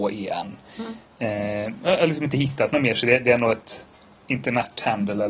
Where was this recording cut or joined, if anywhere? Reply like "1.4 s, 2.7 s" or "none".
none